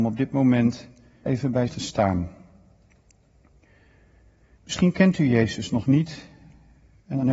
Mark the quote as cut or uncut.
cut